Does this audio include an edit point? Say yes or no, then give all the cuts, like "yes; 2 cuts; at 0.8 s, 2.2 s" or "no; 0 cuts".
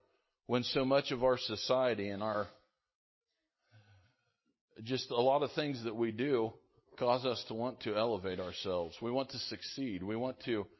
no; 0 cuts